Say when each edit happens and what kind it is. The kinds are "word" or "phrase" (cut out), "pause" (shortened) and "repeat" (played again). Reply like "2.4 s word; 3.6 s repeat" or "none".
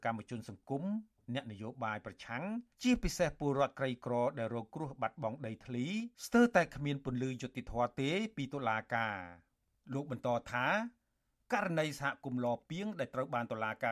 2.7 s pause; 6.1 s pause